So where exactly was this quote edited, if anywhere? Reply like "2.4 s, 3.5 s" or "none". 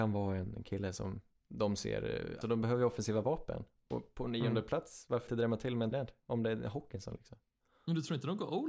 2.4 s, 5.3 s, 5.9 s